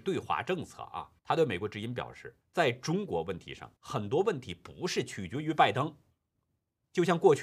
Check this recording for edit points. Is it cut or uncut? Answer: cut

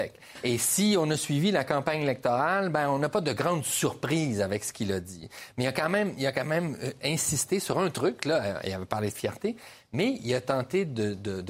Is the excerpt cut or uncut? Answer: uncut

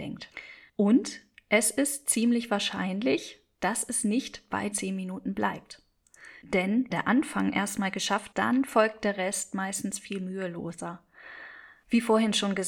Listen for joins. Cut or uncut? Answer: cut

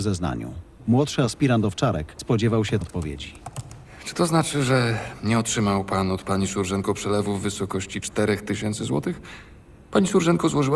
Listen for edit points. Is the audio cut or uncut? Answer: cut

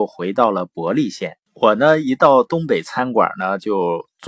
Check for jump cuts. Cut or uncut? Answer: cut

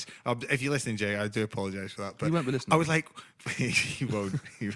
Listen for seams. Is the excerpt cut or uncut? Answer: uncut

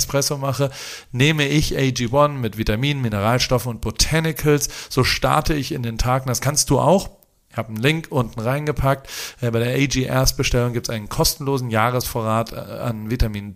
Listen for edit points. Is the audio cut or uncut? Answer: uncut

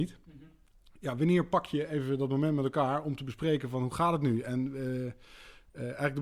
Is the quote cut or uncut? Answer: uncut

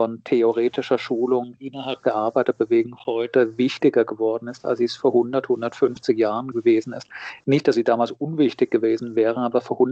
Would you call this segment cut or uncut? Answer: cut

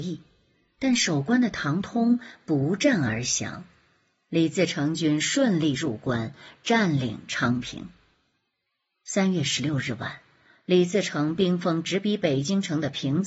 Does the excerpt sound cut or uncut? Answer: uncut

